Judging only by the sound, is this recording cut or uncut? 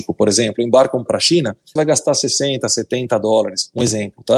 cut